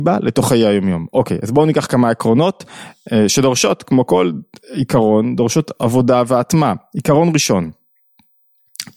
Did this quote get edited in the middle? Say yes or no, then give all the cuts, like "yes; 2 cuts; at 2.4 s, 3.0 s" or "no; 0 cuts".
no; 0 cuts